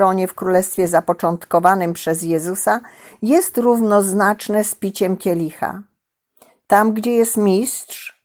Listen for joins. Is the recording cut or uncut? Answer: uncut